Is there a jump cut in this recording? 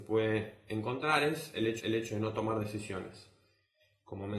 yes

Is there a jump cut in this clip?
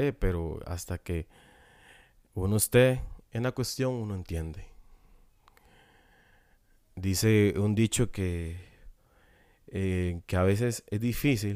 no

